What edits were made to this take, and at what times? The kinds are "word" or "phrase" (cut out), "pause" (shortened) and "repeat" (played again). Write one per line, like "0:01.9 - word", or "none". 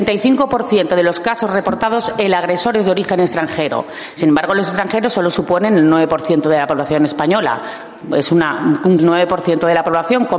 0:09.0 - phrase